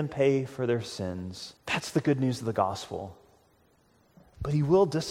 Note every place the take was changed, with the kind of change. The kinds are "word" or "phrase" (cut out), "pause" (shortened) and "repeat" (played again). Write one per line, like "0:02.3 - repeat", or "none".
0:01.6 - pause

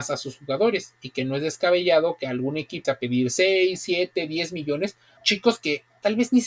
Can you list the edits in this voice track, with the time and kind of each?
0:02.8 - word
0:05.2 - word

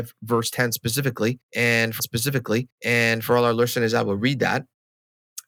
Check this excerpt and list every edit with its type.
0:02.0 - repeat

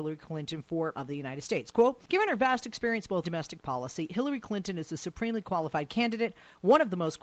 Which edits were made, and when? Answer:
0:00.9 - word
0:02.0 - pause
0:03.2 - phrase

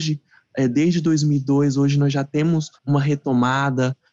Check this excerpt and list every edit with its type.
0:02.8 - pause

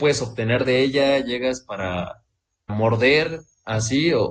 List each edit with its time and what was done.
0:02.7 - word

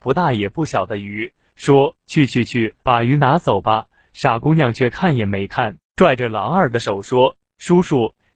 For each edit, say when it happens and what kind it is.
0:02.8 - pause
0:05.9 - pause

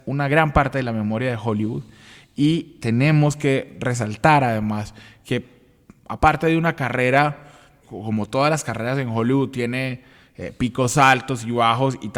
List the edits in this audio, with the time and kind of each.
0:07.8 - word

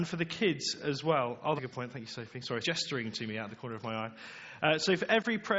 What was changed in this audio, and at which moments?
0:01.6 - word
0:02.6 - word

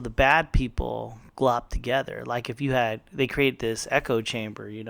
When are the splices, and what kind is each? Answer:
none

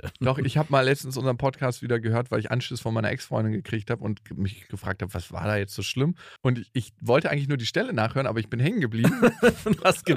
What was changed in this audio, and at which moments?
0:06.4 - pause

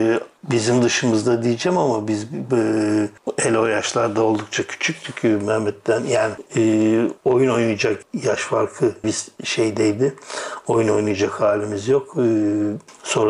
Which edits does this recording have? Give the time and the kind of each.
0:07.2 - pause
0:09.0 - word

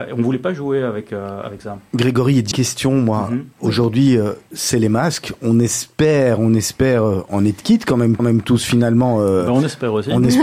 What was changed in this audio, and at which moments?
0:02.5 - phrase
0:03.5 - pause
0:08.2 - repeat

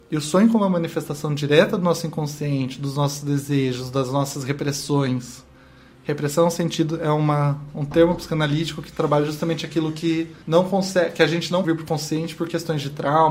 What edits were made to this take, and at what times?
0:10.4 - pause
0:11.6 - word

